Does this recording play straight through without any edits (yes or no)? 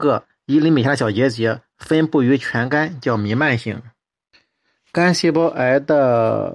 yes